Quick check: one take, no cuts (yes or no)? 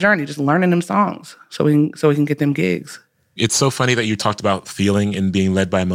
yes